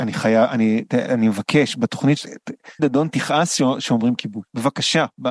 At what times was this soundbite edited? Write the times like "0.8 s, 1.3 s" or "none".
2.2 s, 2.8 s